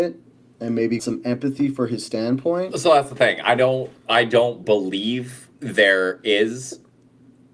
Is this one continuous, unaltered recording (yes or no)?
no